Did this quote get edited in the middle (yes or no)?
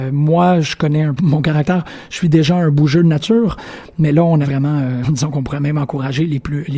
yes